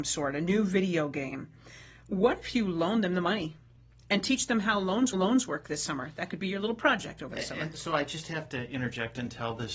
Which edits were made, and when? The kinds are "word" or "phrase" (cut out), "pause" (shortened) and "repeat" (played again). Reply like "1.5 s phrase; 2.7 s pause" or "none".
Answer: 5.1 s repeat